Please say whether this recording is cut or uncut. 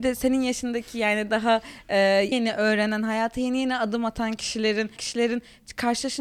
cut